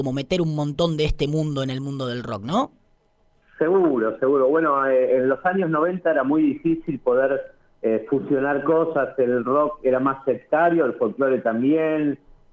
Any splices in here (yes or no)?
no